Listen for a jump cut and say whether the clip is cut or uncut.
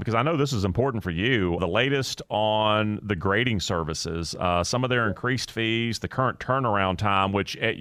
cut